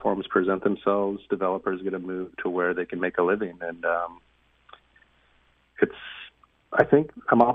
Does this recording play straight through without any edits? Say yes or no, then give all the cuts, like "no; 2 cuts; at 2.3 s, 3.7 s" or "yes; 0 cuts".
yes; 0 cuts